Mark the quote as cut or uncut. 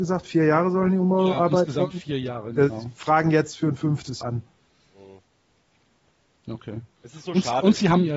cut